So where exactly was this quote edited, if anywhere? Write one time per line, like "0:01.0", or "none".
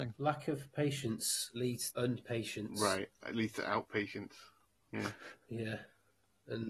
0:01.9